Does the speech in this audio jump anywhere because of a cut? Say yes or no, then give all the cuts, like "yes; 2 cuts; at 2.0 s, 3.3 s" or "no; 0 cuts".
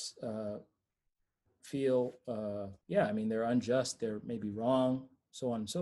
yes; 1 cut; at 2.8 s